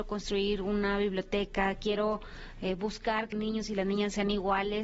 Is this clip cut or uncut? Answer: cut